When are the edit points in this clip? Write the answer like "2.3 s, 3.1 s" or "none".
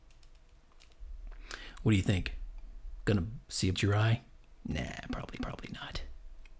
3.4 s, 3.7 s, 5.4 s